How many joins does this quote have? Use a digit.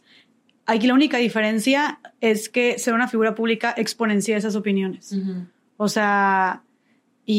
0